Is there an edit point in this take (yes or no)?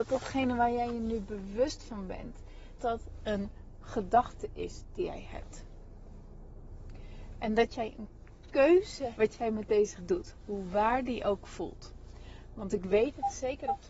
yes